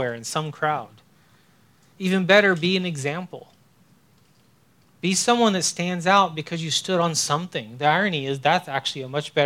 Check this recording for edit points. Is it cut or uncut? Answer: uncut